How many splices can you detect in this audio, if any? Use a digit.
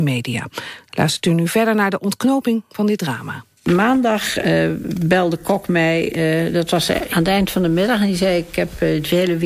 1